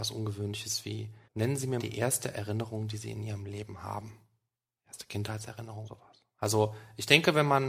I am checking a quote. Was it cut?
yes; 3 cuts; at 1.2 s, 1.8 s, 5.8 s

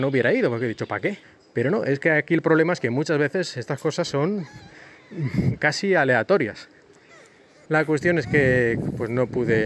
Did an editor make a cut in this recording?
no; 0 cuts

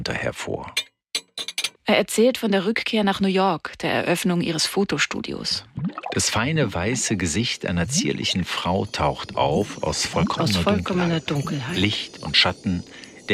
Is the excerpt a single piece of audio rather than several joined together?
no; 1 cut; at 1.8 s

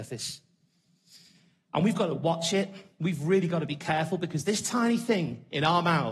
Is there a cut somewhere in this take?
no; 0 cuts

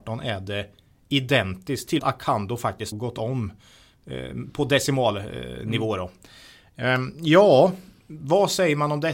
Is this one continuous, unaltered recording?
no; 2 cuts; at 2.0 s, 2.9 s

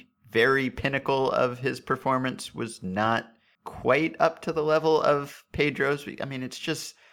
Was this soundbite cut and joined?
no; 0 cuts

